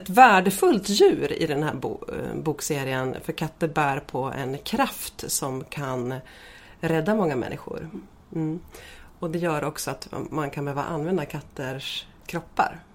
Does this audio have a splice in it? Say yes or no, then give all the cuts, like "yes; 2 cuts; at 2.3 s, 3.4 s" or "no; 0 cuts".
no; 0 cuts